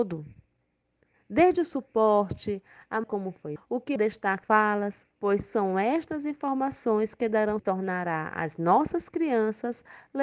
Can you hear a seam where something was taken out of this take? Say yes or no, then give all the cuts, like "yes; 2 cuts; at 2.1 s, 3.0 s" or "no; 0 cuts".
yes; 6 cuts; at 3.0 s, 3.6 s, 4.0 s, 4.4 s, 5.1 s, 7.6 s